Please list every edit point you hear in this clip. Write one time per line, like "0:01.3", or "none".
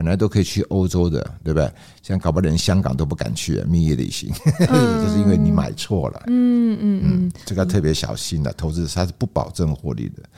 0:06.2